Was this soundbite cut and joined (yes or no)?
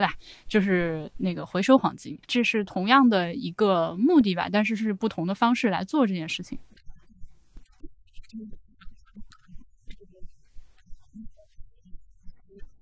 yes